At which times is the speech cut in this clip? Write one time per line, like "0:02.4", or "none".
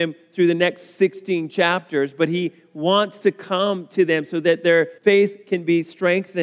0:05.0